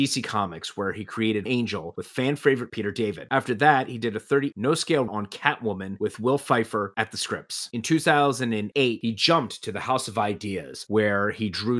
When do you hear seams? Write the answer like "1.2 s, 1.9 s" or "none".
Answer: 1.5 s, 2.7 s, 4.5 s, 5.1 s